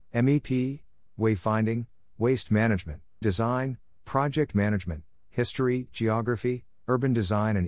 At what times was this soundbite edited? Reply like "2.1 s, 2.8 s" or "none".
1.1 s, 3.2 s